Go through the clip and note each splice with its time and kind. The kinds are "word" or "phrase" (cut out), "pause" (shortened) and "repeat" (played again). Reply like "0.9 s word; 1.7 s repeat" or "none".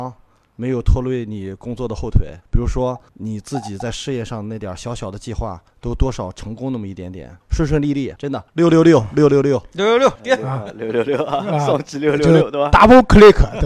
2.4 s pause; 3.1 s pause; 5.7 s pause; 7.4 s pause; 8.2 s phrase; 8.5 s pause; 10.2 s phrase